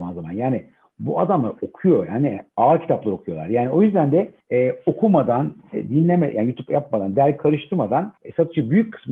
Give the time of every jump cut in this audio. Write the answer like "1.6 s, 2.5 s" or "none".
4.4 s, 8.2 s